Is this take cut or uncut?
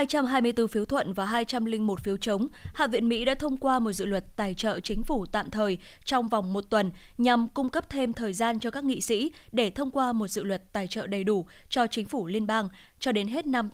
uncut